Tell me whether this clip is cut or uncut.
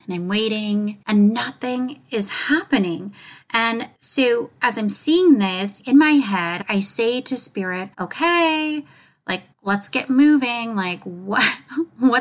cut